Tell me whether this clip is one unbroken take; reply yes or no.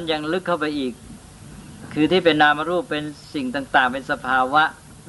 yes